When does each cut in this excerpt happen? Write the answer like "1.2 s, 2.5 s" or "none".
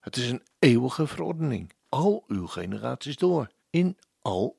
1.8 s, 3.6 s